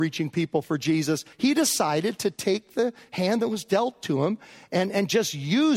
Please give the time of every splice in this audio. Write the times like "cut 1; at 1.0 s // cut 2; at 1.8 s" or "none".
cut 1; at 1.3 s